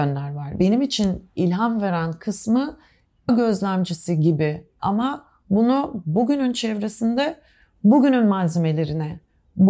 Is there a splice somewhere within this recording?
yes; 2 cuts; at 3.3 s, 4.8 s

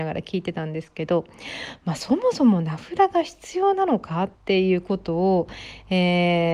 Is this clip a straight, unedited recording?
no; 1 cut; at 4.4 s

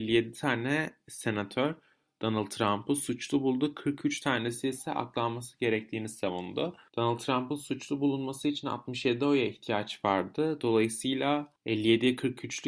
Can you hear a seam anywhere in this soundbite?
no; 0 cuts

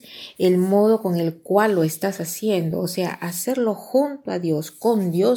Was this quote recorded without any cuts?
yes; 0 cuts

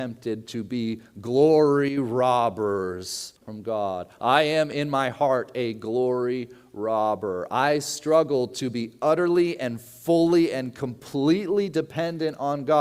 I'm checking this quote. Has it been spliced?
yes; 1 cut; at 3.4 s

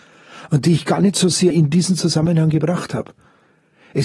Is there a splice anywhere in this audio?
yes; 1 cut; at 1.5 s

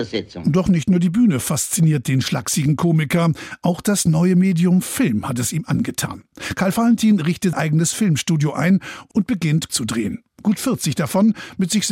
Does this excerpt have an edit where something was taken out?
yes; 2 cuts; at 7.5 s, 9.7 s

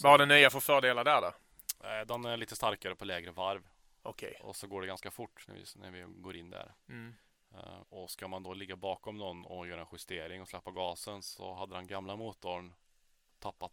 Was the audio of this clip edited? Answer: yes; 1 cut; at 7.8 s

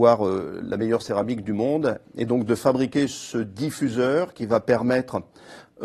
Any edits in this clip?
no; 0 cuts

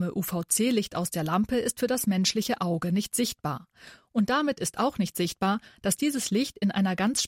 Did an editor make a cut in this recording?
no; 0 cuts

